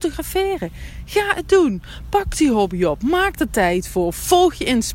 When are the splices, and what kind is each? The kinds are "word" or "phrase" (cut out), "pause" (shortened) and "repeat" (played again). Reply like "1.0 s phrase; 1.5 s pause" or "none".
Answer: none